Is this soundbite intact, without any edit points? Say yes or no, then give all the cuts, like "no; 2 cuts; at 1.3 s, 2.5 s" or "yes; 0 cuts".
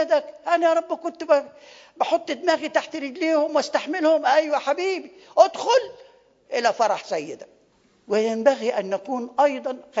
yes; 0 cuts